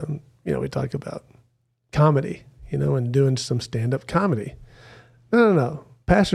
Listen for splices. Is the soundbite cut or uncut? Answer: uncut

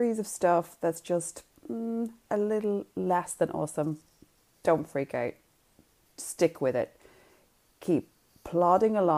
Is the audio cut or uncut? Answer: uncut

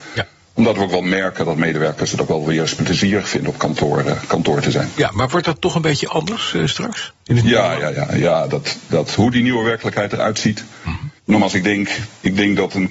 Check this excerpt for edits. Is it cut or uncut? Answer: cut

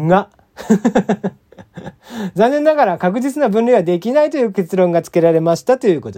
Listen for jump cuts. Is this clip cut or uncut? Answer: cut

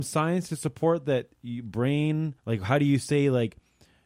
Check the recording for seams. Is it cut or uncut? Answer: cut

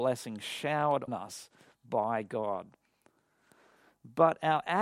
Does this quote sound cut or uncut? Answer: cut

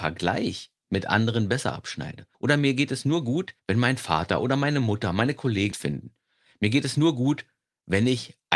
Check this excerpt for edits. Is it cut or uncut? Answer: cut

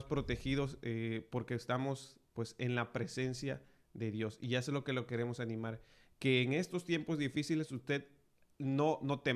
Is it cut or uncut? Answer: uncut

